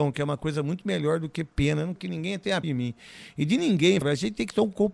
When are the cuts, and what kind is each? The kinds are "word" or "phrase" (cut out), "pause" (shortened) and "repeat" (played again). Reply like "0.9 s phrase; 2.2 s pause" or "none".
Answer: 2.0 s word; 2.6 s word; 4.0 s word